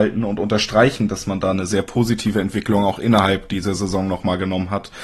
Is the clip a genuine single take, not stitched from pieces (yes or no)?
yes